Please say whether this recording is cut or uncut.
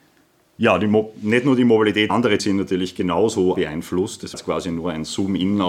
cut